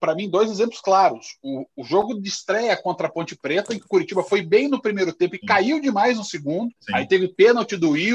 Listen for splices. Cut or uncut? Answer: cut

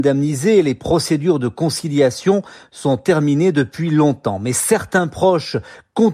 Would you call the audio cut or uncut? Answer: uncut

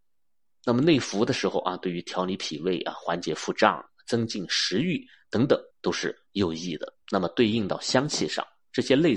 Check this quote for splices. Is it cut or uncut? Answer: cut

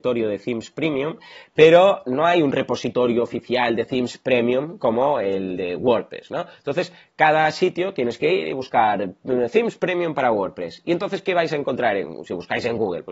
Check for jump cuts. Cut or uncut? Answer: uncut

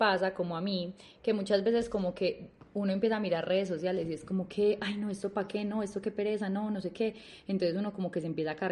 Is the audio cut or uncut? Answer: uncut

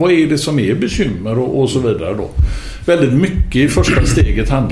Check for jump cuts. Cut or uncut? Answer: uncut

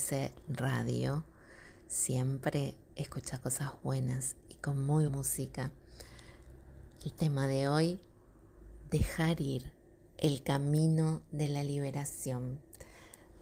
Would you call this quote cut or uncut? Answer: cut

